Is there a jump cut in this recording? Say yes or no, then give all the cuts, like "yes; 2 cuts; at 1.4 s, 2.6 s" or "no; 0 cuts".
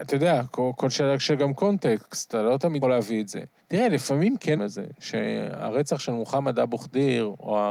yes; 3 cuts; at 2.8 s, 3.6 s, 4.6 s